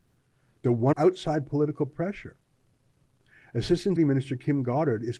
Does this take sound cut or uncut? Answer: cut